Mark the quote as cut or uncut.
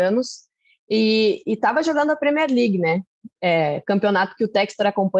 cut